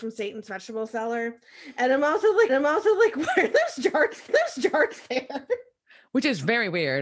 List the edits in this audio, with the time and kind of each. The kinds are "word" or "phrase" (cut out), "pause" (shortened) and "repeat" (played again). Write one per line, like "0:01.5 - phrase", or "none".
0:02.5 - repeat
0:04.3 - repeat